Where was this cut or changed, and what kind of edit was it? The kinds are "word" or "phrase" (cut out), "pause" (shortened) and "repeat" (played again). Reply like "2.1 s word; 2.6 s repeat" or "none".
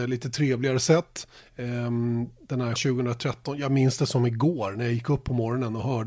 1.4 s pause; 2.8 s word

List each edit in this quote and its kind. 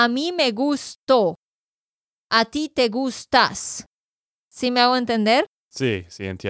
none

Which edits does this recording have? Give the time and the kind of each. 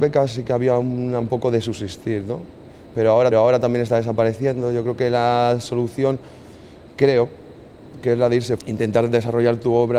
1.2 s word; 3.3 s repeat; 8.6 s word

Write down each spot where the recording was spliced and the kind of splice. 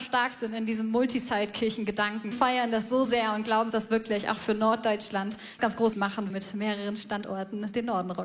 2.3 s phrase; 3.0 s word; 3.7 s word; 5.6 s word; 5.9 s word; 6.3 s phrase

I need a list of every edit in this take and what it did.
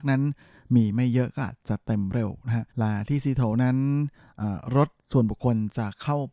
2.7 s pause

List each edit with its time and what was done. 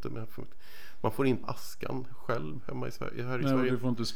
1.4 s phrase

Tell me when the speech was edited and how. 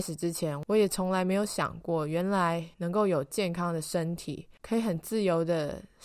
2.7 s pause; 4.5 s pause

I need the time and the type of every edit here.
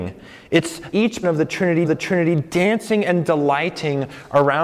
0.9 s word; 1.2 s word; 1.8 s repeat

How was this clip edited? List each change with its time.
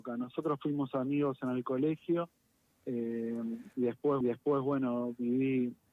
3.7 s pause; 4.2 s repeat

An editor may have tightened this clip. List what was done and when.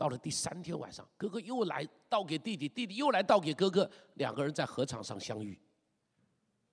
none

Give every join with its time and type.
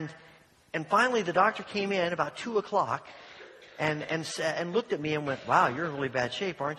none

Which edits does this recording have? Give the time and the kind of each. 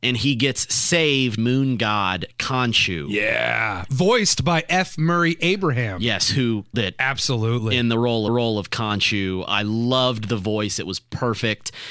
1.4 s phrase; 6.7 s word; 8.3 s repeat

